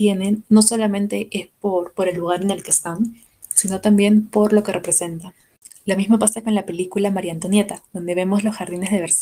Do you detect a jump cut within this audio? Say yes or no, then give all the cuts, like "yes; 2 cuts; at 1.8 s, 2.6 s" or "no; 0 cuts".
no; 0 cuts